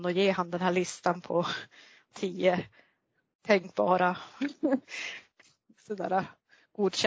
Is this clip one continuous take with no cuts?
no; 1 cut; at 2.1 s

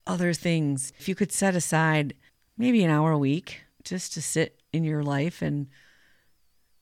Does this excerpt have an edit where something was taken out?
yes; 1 cut; at 2.3 s

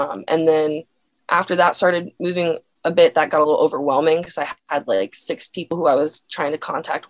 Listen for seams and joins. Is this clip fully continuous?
yes; 0 cuts

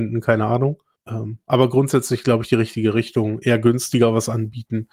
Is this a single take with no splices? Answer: no; 1 cut; at 1.0 s

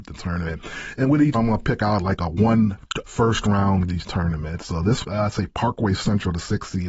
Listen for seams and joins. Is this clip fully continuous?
no; 4 cuts; at 1.3 s, 3.0 s, 3.9 s, 5.0 s

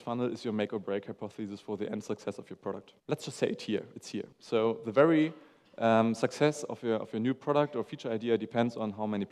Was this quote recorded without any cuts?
no; 2 cuts; at 3.0 s, 4.3 s

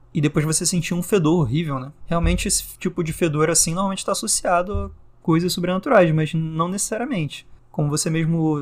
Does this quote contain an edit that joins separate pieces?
no; 0 cuts

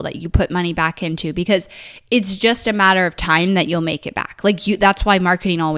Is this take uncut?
yes; 0 cuts

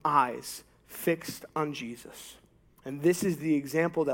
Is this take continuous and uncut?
yes; 0 cuts

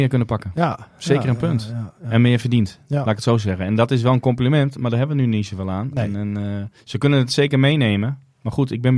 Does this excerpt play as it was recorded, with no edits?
no; 1 cut; at 6.8 s

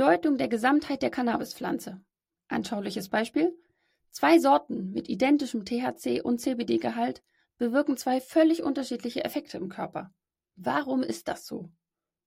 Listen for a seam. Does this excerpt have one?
no; 0 cuts

